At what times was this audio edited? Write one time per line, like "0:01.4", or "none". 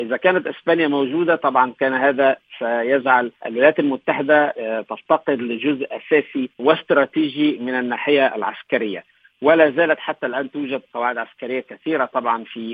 0:03.4
0:06.5